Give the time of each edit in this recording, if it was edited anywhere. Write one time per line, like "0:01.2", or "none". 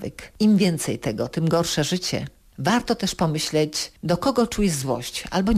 none